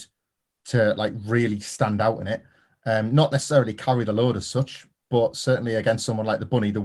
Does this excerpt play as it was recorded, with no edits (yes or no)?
yes